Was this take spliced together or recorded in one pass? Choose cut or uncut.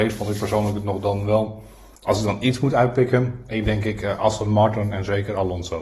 cut